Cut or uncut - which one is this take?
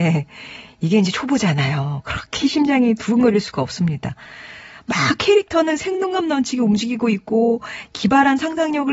uncut